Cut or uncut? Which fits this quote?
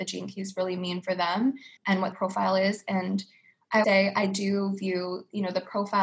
cut